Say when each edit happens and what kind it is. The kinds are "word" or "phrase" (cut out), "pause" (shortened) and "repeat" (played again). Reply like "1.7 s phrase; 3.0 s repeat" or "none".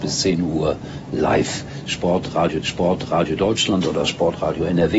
2.6 s repeat